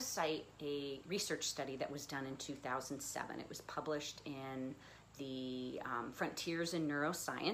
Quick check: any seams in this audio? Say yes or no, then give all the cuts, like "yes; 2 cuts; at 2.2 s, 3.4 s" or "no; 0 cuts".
no; 0 cuts